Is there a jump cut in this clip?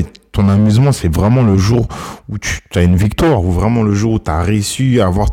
no; 0 cuts

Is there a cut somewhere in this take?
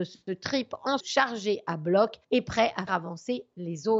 yes; 3 cuts; at 1.0 s, 2.2 s, 2.9 s

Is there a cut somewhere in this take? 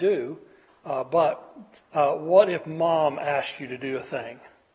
no; 0 cuts

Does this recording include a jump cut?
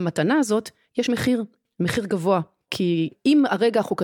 no; 0 cuts

